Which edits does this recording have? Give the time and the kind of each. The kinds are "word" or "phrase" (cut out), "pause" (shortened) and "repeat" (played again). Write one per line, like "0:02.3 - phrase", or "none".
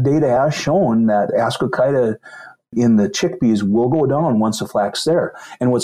0:01.3 - word